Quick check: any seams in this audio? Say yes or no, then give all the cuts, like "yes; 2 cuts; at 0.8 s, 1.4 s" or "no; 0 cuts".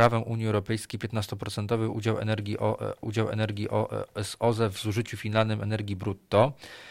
yes; 1 cut; at 3.0 s